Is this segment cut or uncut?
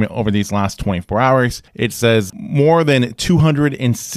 cut